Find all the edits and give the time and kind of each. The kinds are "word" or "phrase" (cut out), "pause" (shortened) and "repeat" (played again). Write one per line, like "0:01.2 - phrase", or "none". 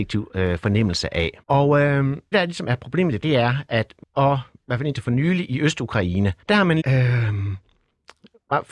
0:01.4 - pause
0:02.3 - word
0:03.2 - word
0:04.0 - phrase
0:06.4 - pause
0:06.8 - word